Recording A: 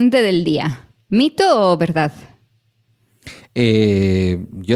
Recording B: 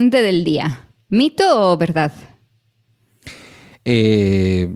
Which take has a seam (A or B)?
A